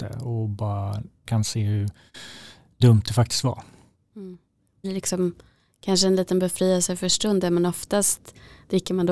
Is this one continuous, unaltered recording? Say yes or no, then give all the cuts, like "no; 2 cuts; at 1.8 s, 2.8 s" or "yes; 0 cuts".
no; 2 cuts; at 1.2 s, 4.8 s